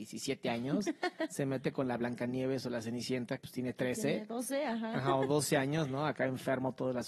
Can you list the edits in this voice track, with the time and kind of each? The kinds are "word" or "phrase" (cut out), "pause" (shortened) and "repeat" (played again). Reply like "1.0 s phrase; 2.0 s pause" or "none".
3.4 s word